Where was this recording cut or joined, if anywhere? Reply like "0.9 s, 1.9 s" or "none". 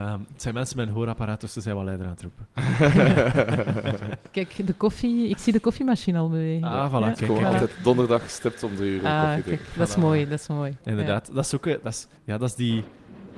12.2 s